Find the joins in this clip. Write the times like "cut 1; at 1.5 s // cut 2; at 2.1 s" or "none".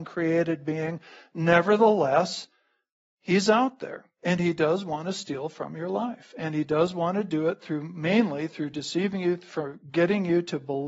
none